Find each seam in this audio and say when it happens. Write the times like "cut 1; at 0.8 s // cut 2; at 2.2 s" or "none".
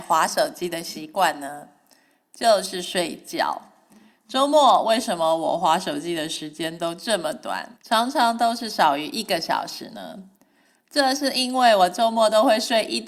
cut 1; at 7.8 s